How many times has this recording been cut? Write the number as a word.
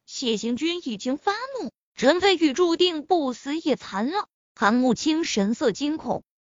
one